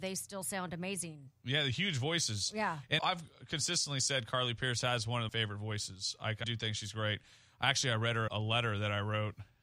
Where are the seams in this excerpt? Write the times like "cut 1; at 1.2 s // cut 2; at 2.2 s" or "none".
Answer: cut 1; at 3.0 s // cut 2; at 5.3 s // cut 3; at 6.4 s // cut 4; at 8.3 s